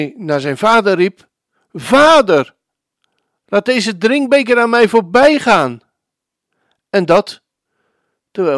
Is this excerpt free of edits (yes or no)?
yes